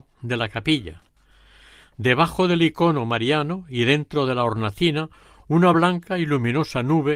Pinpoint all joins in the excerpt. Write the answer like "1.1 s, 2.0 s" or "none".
none